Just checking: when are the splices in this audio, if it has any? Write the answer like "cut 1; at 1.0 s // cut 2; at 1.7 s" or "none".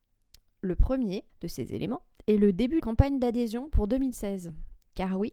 cut 1; at 1.3 s // cut 2; at 2.8 s